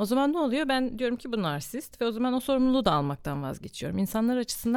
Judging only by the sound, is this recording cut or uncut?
uncut